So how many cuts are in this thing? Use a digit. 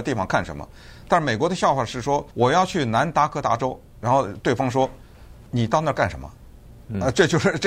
2